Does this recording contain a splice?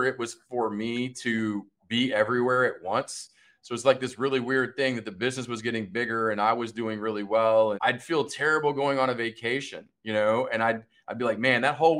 yes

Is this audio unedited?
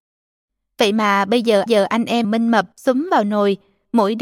no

